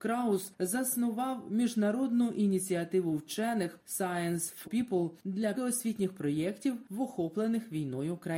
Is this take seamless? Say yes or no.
no